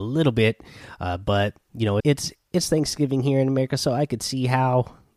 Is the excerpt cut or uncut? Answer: cut